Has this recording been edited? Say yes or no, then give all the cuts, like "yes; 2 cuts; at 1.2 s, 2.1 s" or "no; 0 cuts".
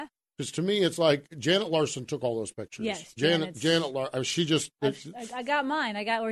no; 0 cuts